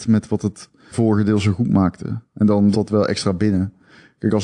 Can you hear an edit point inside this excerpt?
yes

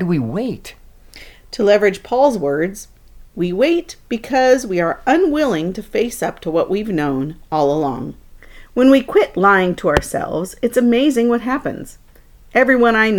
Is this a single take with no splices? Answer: yes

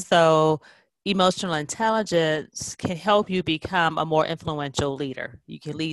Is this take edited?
no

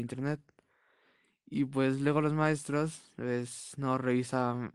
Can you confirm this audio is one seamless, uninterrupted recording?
no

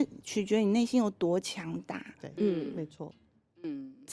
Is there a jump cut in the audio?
no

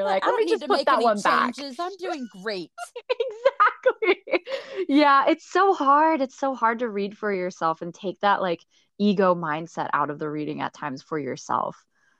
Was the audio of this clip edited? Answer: no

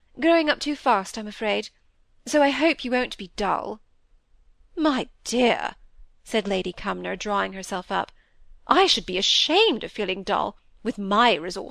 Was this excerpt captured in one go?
yes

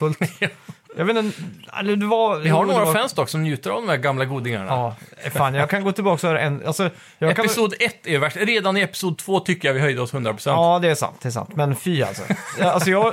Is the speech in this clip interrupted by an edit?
no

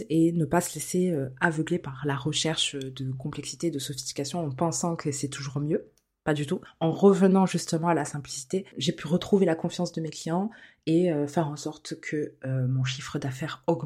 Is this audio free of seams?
yes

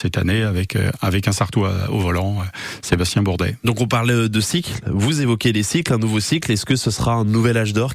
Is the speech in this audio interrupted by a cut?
no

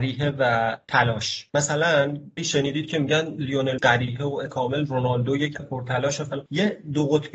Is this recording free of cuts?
no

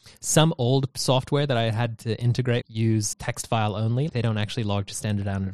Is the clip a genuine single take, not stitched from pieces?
no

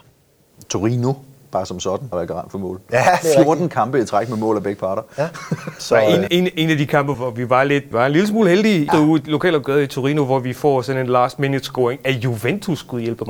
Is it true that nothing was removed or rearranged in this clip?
no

